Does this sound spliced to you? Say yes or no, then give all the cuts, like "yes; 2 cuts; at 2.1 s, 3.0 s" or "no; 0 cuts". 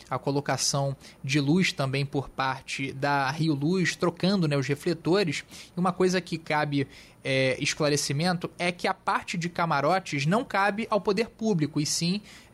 no; 0 cuts